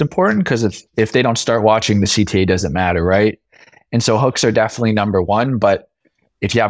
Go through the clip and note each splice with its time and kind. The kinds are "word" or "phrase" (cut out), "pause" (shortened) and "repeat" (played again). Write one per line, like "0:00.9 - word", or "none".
none